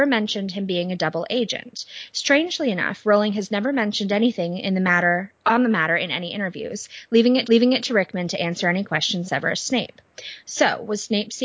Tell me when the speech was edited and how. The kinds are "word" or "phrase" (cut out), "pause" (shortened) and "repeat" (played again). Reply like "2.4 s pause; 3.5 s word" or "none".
7.4 s repeat; 9.2 s word